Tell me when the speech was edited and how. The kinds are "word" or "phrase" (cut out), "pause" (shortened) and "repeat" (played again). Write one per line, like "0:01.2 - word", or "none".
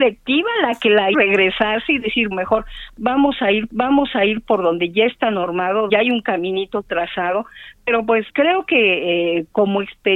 0:01.1 - word
0:02.3 - word
0:03.7 - repeat
0:05.9 - word
0:08.3 - word